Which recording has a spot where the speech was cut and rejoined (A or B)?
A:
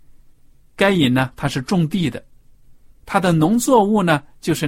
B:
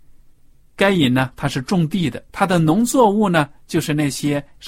B